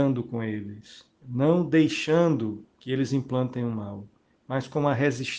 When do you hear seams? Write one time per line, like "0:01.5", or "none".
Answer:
0:01.2
0:02.7